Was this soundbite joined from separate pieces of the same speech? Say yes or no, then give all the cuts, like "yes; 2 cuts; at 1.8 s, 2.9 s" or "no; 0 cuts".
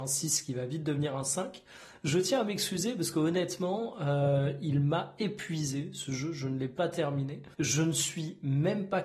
yes; 1 cut; at 7.5 s